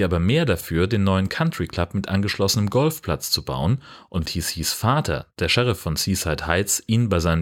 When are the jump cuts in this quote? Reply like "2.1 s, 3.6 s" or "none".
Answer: 4.2 s